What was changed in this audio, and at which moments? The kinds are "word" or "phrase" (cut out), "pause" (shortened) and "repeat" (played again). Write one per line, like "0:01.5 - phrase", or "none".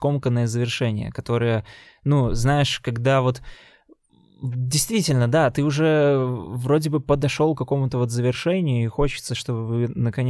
none